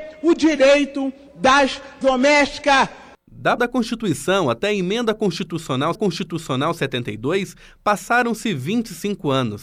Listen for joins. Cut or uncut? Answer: cut